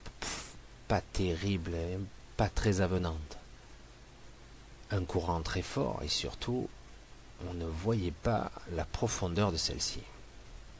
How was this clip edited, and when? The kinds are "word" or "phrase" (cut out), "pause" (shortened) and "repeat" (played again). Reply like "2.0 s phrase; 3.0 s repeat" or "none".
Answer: none